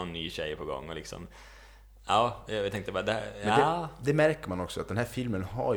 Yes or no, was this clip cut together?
no